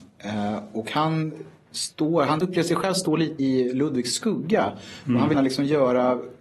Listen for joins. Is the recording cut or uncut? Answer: cut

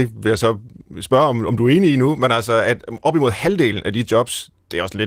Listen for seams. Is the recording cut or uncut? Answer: uncut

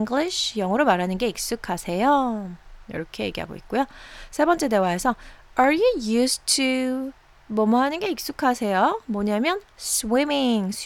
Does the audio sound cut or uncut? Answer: uncut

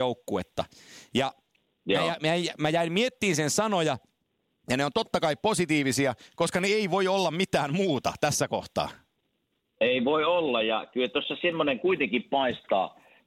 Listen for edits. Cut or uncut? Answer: uncut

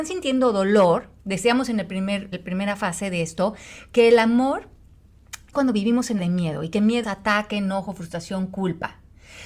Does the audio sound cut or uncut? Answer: cut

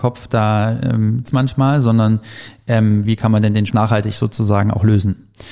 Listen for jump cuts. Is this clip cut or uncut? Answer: cut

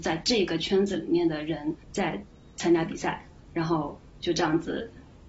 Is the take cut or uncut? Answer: cut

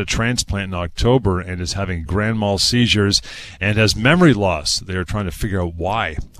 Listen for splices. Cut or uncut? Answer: uncut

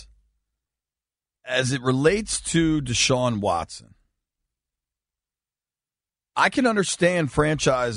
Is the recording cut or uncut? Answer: uncut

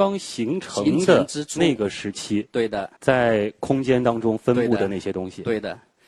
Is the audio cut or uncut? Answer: cut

